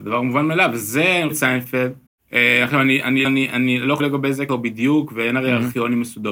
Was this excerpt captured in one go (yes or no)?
no